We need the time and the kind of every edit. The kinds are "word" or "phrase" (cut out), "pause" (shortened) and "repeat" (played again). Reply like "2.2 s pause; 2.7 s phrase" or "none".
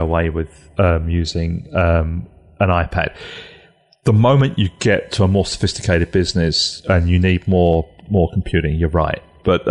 none